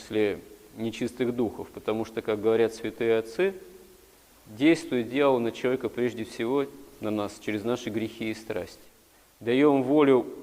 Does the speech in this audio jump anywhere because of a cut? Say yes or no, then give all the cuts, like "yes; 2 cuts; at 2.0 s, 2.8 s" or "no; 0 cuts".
no; 0 cuts